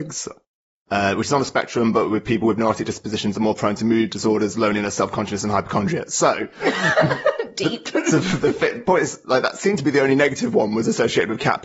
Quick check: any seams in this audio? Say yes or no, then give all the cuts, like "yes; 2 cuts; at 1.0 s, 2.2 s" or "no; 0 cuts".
no; 0 cuts